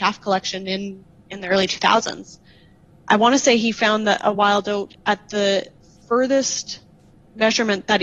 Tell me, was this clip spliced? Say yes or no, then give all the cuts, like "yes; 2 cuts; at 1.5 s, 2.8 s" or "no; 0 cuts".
no; 0 cuts